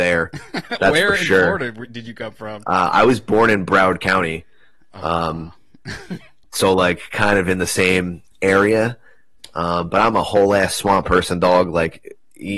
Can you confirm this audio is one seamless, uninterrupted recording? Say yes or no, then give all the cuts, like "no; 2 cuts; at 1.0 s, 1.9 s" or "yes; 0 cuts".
yes; 0 cuts